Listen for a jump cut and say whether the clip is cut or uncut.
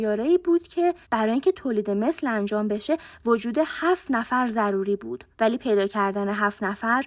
cut